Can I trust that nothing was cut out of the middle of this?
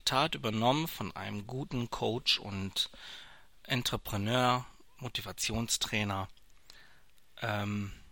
yes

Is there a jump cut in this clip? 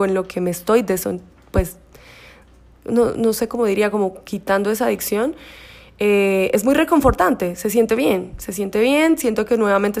no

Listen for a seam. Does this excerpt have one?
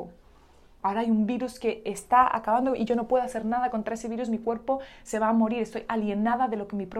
no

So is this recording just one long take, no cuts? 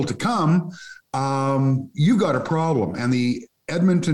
yes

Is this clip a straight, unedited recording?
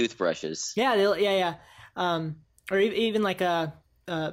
yes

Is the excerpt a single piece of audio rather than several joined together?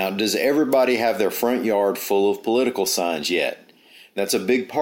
yes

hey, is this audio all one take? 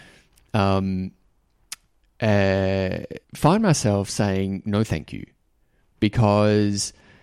no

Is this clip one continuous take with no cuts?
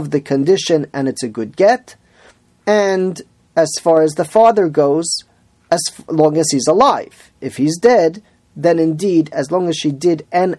yes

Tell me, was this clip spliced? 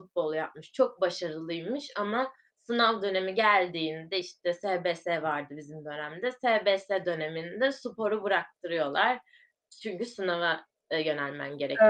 no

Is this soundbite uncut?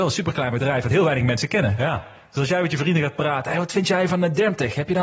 yes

